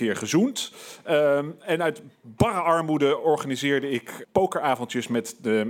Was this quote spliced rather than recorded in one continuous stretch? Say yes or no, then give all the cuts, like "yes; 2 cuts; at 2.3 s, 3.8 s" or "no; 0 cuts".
yes; 1 cut; at 4.2 s